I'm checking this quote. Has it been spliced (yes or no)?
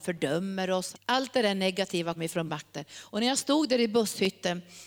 yes